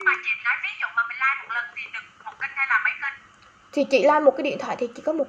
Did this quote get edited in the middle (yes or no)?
no